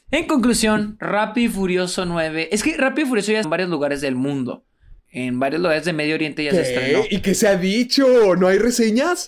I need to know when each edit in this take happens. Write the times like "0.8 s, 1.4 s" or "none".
3.4 s, 5.0 s

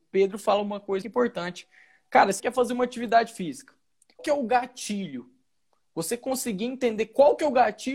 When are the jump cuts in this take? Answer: 1.0 s, 2.4 s, 4.2 s

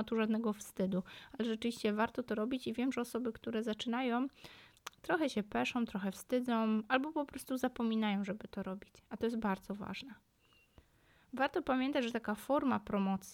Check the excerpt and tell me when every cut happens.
none

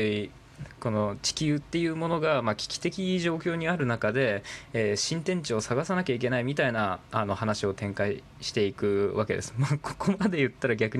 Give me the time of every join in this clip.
none

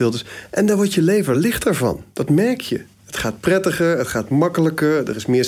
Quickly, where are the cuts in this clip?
none

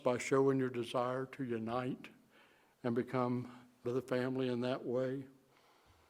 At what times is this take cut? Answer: 3.8 s

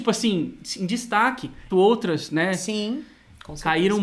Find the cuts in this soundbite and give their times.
1.7 s

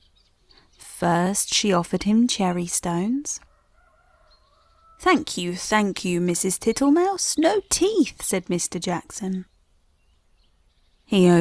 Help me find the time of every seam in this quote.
none

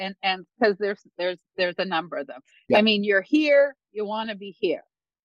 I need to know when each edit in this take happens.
none

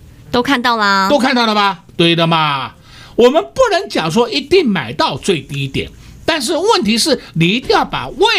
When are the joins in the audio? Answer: 1.9 s

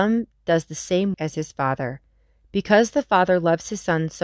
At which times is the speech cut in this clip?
1.1 s

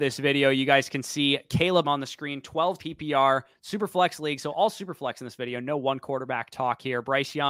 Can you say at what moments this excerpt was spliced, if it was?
1.8 s, 2.8 s

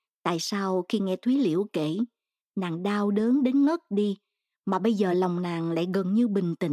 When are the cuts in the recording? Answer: none

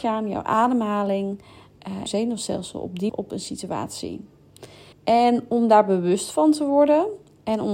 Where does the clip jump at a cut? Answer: 2.1 s, 3.1 s, 4.9 s

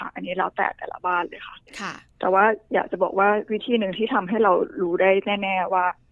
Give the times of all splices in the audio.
1.7 s

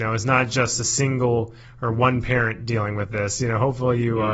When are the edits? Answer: none

